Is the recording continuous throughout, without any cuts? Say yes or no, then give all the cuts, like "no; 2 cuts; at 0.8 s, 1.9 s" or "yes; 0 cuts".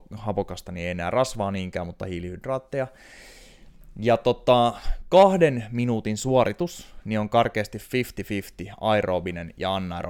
yes; 0 cuts